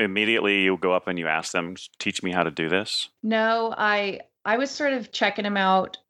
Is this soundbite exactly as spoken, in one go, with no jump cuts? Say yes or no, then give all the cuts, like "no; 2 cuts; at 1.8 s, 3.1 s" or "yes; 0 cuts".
yes; 0 cuts